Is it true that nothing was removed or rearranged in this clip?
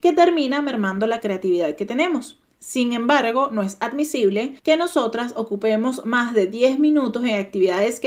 no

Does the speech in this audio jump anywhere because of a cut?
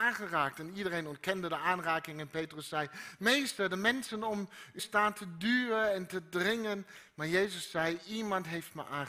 yes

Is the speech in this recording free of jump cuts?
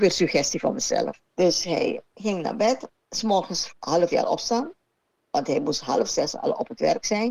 no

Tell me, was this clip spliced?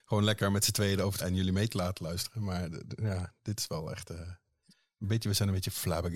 yes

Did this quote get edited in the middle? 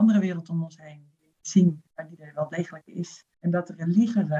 yes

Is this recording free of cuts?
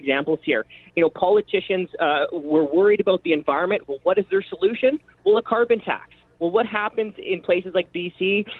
yes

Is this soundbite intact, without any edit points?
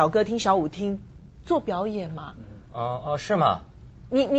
yes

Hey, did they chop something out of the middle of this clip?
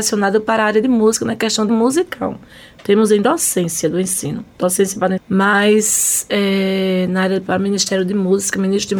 yes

